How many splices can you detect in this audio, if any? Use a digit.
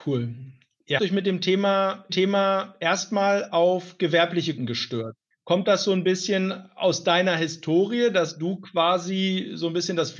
4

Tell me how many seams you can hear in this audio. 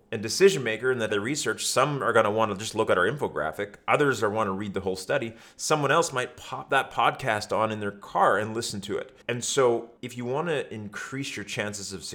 3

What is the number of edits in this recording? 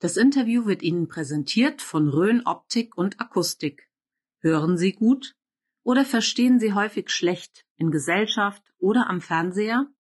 0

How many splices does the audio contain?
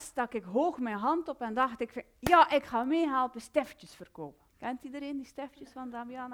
1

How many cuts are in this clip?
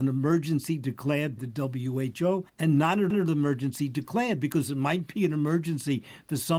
3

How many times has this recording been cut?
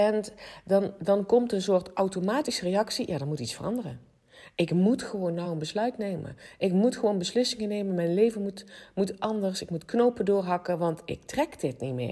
0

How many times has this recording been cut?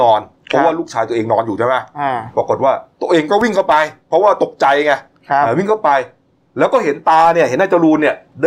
0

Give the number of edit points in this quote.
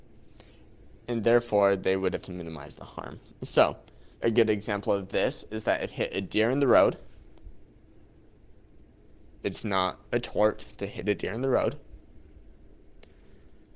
5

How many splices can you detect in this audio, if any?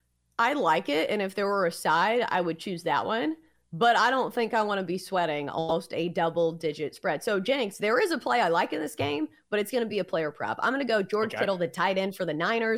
0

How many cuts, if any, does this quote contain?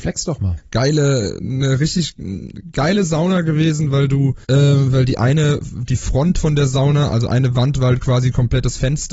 1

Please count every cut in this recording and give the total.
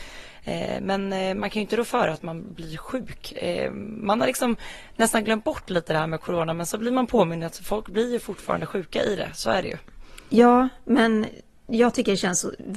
0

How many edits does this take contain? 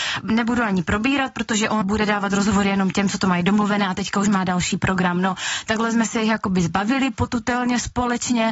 1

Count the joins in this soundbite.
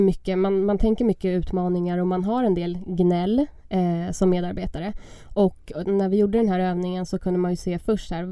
0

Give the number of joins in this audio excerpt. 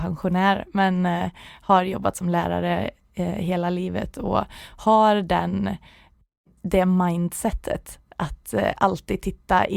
0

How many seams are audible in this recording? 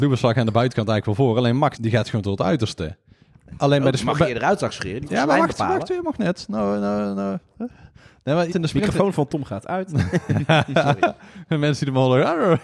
3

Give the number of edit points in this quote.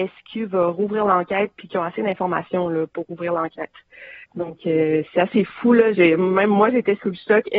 1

